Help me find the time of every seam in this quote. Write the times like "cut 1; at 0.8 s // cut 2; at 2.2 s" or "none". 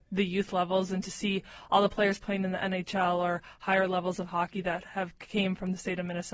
none